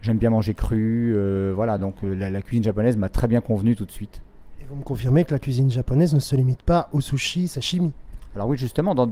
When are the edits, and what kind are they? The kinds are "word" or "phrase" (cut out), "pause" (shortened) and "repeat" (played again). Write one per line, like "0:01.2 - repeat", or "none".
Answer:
none